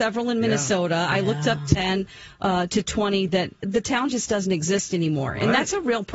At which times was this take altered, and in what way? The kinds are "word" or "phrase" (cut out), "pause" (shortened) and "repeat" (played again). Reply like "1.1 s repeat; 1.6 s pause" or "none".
none